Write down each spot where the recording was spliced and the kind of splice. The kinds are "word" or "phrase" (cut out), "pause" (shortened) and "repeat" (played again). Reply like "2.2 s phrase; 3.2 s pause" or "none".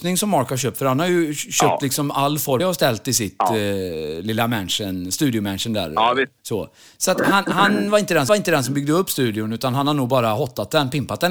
2.6 s phrase; 6.4 s pause; 8.3 s repeat